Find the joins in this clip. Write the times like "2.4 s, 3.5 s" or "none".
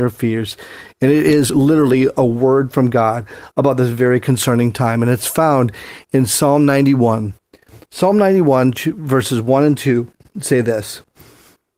none